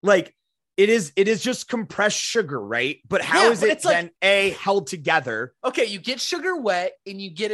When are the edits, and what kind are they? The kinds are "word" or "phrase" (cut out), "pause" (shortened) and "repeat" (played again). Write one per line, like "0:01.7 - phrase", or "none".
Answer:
0:04.2 - pause